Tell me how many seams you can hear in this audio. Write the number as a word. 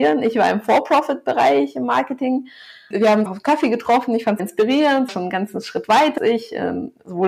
five